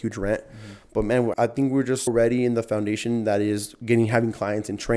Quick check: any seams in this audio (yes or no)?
yes